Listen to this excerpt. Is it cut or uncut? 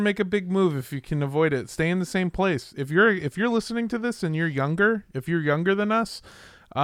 uncut